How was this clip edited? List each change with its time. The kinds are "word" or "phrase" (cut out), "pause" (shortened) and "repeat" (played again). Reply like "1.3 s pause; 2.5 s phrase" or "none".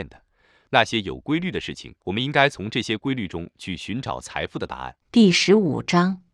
2.0 s pause; 5.0 s pause